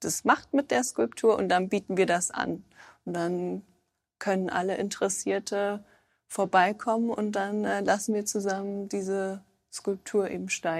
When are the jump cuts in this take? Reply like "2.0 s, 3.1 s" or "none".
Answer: none